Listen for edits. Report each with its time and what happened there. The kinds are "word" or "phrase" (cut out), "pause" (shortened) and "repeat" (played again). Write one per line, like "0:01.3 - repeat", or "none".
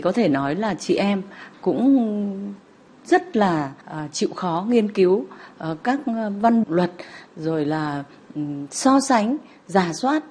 0:03.8 - pause
0:06.6 - phrase